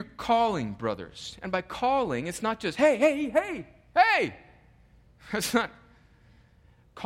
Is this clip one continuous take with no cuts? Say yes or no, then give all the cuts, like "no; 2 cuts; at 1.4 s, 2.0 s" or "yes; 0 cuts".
yes; 0 cuts